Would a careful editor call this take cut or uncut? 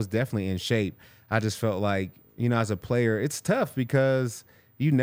uncut